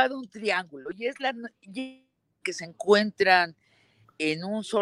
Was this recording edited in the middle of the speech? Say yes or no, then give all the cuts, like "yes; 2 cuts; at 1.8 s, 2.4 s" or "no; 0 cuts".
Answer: no; 0 cuts